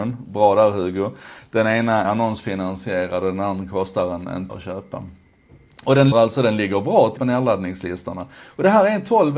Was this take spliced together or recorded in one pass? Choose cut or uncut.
cut